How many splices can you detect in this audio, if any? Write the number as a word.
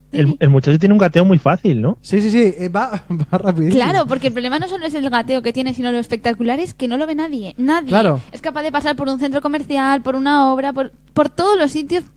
zero